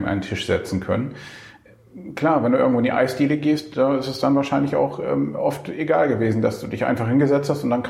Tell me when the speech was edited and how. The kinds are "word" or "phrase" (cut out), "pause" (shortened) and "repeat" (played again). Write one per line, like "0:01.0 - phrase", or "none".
none